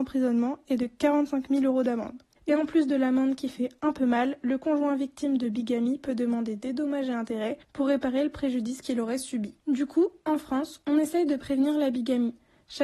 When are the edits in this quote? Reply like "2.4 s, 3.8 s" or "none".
2.4 s, 7.6 s, 9.6 s